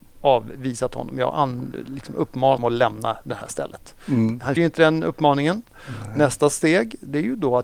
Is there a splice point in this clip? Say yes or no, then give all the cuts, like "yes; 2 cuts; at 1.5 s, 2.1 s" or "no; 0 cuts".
yes; 2 cuts; at 2.6 s, 4.6 s